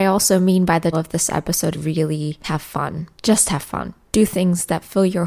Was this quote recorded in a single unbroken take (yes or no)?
no